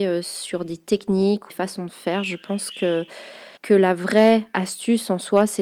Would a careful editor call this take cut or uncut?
cut